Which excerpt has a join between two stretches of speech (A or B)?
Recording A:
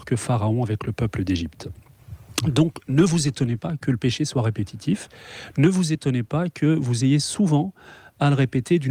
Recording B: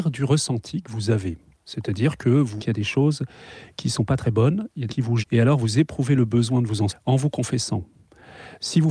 B